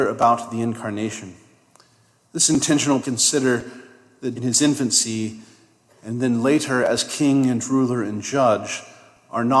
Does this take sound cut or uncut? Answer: cut